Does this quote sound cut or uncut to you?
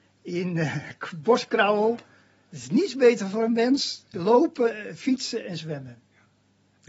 cut